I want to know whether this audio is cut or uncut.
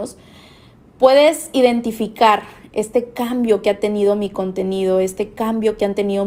uncut